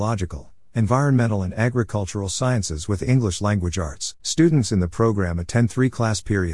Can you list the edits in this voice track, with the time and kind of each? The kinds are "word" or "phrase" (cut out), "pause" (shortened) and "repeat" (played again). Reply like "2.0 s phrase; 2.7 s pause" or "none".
4.2 s pause